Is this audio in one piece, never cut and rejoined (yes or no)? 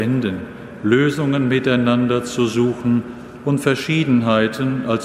yes